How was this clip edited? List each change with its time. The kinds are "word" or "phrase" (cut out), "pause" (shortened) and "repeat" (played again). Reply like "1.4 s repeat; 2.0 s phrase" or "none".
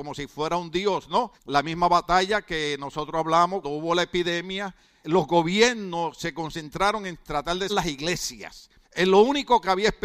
1.4 s pause; 3.6 s word; 5.0 s word; 7.7 s word; 8.8 s pause